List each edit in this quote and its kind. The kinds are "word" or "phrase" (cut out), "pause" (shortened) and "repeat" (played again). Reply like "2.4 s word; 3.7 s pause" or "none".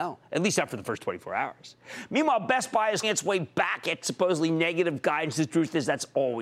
3.0 s word; 4.0 s word